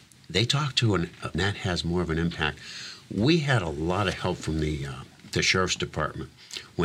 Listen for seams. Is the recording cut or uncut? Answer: cut